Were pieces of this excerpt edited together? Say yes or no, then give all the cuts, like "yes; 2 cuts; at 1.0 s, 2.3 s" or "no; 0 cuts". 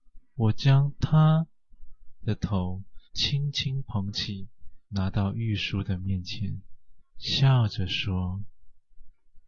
yes; 3 cuts; at 3.0 s, 4.8 s, 7.1 s